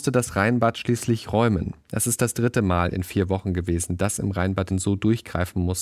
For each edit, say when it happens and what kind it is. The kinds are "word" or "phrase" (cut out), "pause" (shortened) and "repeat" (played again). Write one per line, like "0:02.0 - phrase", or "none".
0:04.7 - phrase